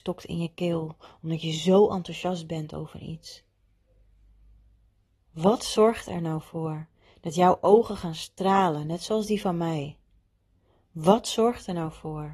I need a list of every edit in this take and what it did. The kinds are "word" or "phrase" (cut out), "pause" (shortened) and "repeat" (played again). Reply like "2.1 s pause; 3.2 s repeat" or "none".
none